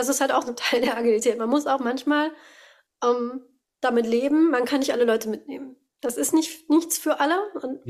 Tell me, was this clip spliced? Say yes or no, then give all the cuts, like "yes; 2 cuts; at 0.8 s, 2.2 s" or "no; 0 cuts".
no; 0 cuts